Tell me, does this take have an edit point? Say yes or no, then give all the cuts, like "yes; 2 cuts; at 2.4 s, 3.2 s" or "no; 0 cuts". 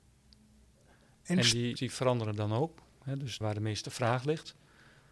yes; 2 cuts; at 1.8 s, 3.4 s